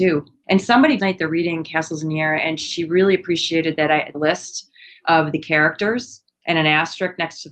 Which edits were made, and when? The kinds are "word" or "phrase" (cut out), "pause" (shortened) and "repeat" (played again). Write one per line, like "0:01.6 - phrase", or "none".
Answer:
0:01.0 - phrase
0:04.1 - phrase